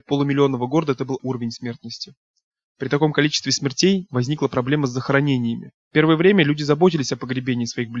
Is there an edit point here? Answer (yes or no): yes